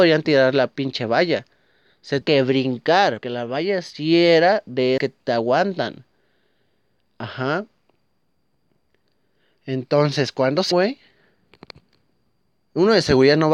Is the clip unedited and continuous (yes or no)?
no